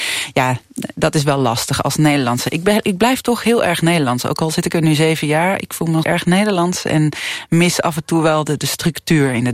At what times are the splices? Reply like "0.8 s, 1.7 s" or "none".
6.0 s